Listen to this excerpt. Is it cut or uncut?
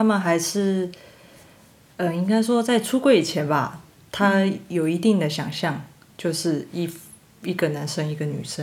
uncut